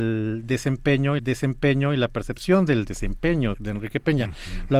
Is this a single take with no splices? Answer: no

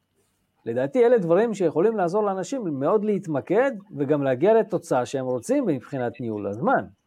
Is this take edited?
yes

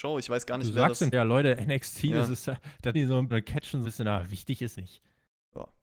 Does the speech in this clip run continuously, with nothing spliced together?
no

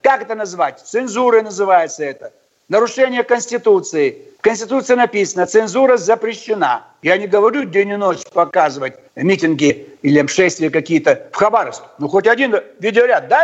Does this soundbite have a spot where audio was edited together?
yes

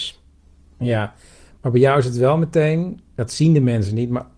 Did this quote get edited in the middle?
no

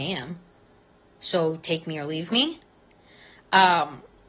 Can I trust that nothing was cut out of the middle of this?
yes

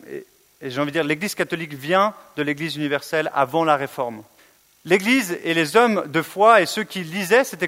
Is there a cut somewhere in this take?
yes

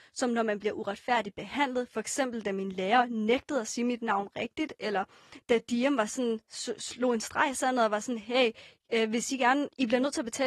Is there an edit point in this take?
no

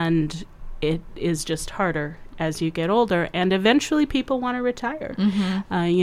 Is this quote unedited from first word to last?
yes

